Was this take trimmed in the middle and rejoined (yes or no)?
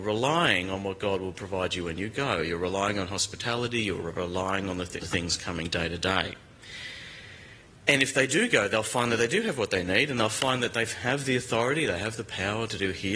yes